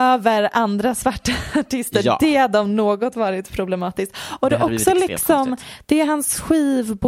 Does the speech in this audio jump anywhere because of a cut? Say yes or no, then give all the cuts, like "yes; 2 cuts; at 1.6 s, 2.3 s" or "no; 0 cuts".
no; 0 cuts